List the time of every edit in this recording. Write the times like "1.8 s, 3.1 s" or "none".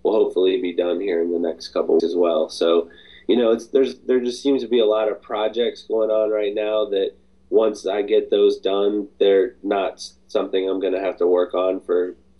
2.0 s